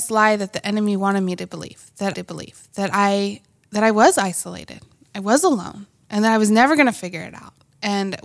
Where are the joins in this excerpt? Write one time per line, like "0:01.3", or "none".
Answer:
0:02.1